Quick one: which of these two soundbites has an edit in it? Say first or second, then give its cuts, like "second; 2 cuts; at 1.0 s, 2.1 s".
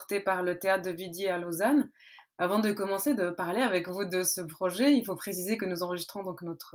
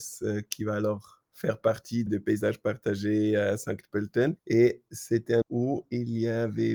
second; 2 cuts; at 2.1 s, 5.4 s